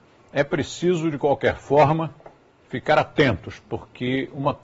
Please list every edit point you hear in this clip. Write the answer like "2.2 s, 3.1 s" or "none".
none